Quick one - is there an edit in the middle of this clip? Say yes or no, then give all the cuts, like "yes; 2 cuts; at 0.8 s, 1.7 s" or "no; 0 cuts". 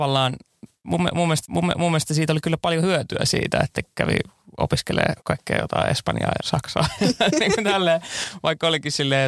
yes; 3 cuts; at 1.4 s, 5.2 s, 6.4 s